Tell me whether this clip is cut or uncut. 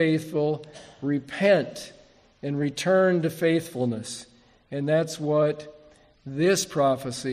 uncut